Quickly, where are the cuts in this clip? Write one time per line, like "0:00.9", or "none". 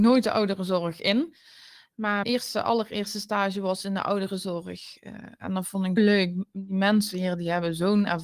0:02.2
0:06.0